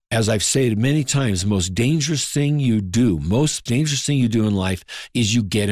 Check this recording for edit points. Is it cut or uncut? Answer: cut